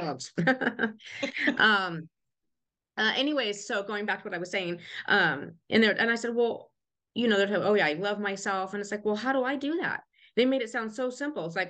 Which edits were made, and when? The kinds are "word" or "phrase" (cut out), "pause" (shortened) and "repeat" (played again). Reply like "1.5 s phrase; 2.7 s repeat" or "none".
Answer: none